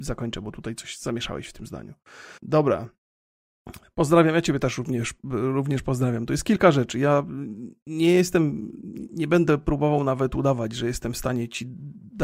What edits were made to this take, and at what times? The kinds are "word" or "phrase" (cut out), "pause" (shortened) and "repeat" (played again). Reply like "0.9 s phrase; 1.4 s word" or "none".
2.4 s pause